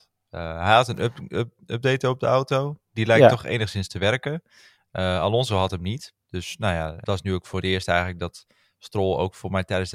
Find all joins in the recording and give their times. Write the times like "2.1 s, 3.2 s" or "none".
7.0 s